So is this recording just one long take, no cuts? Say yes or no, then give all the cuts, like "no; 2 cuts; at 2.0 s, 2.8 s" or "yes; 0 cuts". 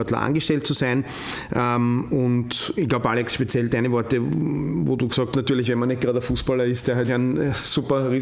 no; 2 cuts; at 5.3 s, 7.1 s